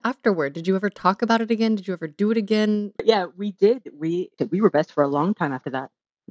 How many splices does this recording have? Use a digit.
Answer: 2